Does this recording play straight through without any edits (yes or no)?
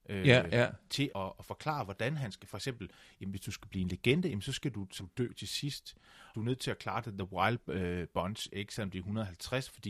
no